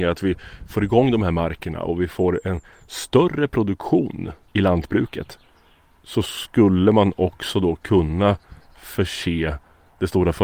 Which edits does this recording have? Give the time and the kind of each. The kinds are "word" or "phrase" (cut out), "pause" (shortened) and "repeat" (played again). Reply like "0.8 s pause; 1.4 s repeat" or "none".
none